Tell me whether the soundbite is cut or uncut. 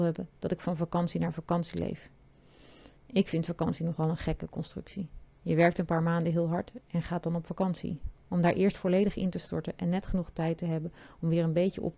cut